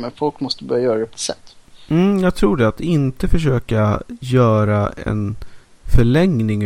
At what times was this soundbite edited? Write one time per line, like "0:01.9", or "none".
0:01.1